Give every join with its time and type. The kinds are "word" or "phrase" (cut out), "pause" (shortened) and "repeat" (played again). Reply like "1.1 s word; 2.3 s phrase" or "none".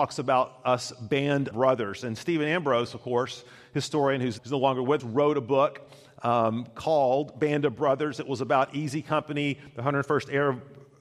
1.5 s word; 4.4 s word; 5.0 s word